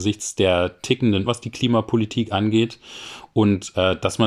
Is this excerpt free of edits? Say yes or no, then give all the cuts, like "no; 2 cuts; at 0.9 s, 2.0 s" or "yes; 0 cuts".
no; 1 cut; at 1.3 s